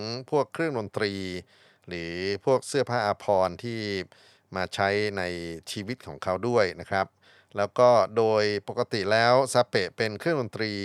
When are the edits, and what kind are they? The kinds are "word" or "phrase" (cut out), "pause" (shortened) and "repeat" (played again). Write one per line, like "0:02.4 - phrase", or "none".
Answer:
none